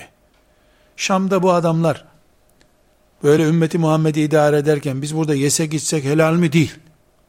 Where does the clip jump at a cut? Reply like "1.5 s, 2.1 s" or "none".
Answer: none